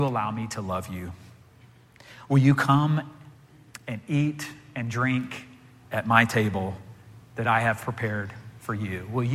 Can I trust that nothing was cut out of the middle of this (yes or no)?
yes